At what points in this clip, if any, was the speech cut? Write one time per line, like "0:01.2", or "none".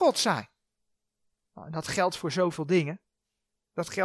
none